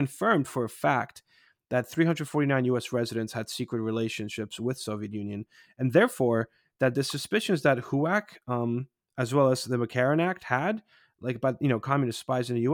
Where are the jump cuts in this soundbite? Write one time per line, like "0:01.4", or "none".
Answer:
none